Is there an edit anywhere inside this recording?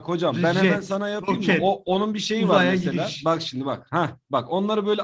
no; 0 cuts

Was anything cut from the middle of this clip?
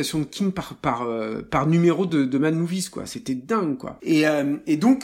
no; 0 cuts

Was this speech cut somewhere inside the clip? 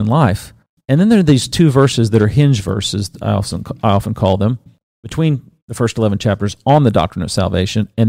no; 0 cuts

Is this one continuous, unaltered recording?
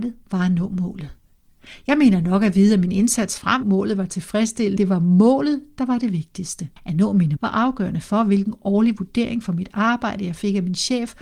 no; 4 cuts; at 3.6 s, 4.8 s, 6.8 s, 7.4 s

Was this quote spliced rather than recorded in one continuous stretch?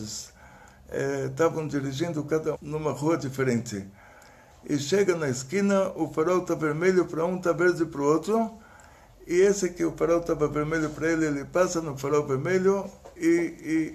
yes; 1 cut; at 2.5 s

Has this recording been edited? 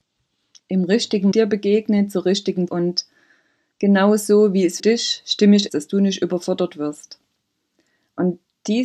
yes; 4 cuts; at 1.3 s, 2.7 s, 4.8 s, 5.7 s

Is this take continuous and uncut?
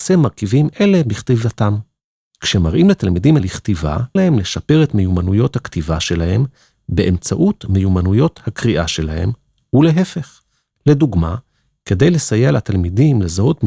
no; 2 cuts; at 3.4 s, 4.2 s

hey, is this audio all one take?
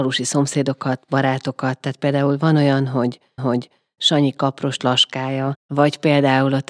no; 2 cuts; at 3.4 s, 4.8 s

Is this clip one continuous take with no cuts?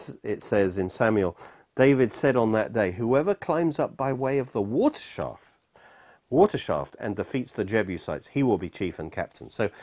yes; 0 cuts

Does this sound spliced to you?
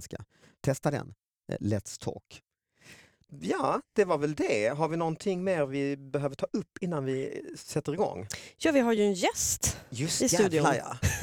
no; 0 cuts

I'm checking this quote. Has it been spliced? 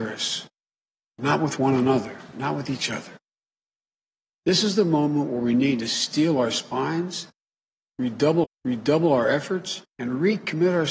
yes; 2 cuts; at 8.4 s, 9.9 s

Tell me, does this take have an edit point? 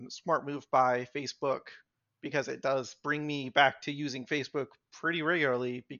no; 0 cuts

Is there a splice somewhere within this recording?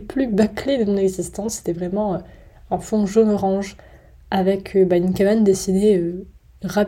no; 0 cuts

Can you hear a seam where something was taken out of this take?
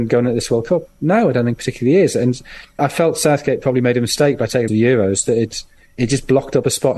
yes; 2 cuts; at 2.8 s, 4.7 s

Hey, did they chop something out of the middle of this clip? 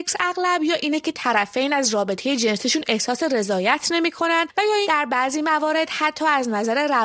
yes; 1 cut; at 4.8 s

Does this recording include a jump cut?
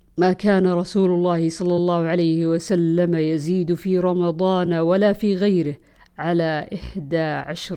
no; 0 cuts

